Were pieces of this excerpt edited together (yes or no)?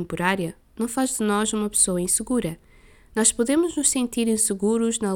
no